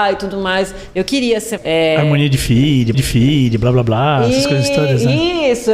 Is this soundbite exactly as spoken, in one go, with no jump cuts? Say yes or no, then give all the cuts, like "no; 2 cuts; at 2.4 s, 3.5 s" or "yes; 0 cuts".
no; 2 cuts; at 1.6 s, 2.9 s